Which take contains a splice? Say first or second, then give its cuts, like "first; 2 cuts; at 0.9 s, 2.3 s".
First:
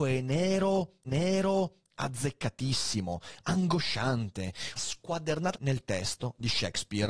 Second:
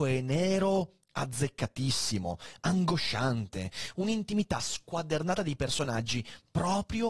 first; 3 cuts; at 1.1 s, 4.8 s, 5.5 s